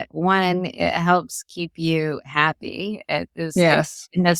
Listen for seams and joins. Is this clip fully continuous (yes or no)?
yes